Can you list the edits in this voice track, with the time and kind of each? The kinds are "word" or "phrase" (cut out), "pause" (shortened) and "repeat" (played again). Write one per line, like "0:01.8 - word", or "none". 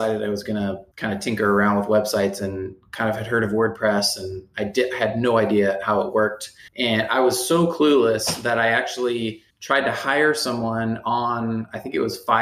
0:00.9 - pause
0:06.7 - pause
0:09.5 - pause

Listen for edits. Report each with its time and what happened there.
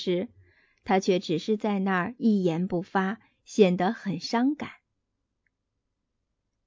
none

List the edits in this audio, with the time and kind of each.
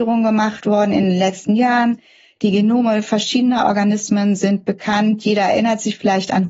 none

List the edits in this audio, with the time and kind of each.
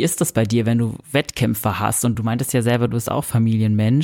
none

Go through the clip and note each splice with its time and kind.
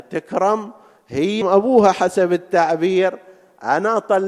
0:01.4 - word

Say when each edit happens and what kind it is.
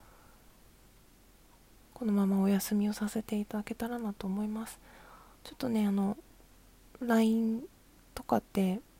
none

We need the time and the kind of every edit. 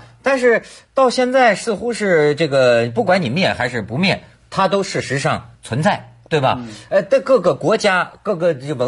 0:05.5 - pause

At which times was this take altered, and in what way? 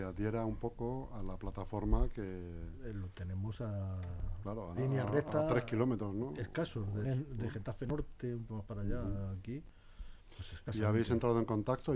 0:04.8 - word
0:07.0 - word
0:08.5 - word

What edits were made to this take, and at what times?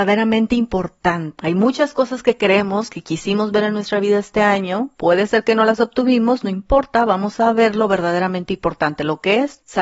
none

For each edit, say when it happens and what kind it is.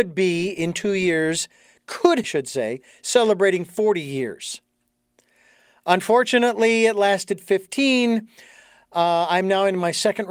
0:02.2 - phrase

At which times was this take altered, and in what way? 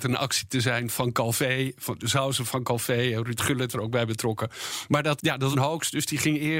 0:03.7 - word
0:05.2 - word
0:05.5 - phrase

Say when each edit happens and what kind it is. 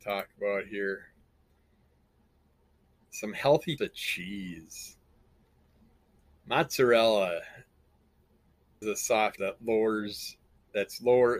0:03.8 - word
0:08.8 - word
0:09.4 - word

